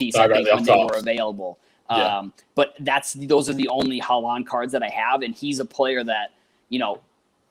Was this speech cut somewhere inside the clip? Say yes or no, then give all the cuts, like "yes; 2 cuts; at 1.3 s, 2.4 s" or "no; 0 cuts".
no; 0 cuts